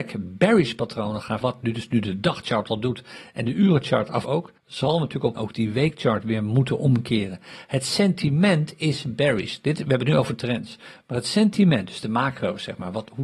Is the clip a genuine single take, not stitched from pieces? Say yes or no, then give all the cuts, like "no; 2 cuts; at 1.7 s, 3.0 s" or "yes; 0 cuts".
no; 4 cuts; at 1.4 s, 4.2 s, 4.6 s, 5.4 s